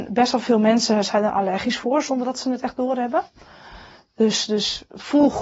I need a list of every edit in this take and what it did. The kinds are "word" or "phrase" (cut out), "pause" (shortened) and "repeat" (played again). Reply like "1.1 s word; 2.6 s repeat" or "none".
none